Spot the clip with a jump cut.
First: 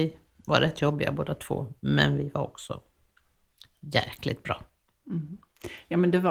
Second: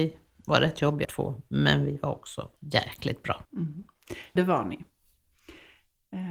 second; 4 cuts; at 1.0 s, 2.6 s, 3.4 s, 4.4 s

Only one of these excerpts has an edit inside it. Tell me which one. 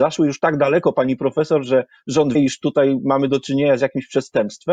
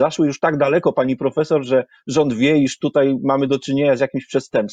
first; 1 cut; at 2.4 s

